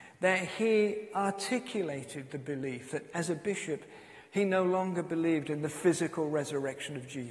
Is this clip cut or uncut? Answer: uncut